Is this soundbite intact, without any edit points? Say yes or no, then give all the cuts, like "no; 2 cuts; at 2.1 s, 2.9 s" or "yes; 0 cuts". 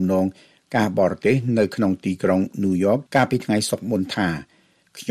no; 1 cut; at 3.1 s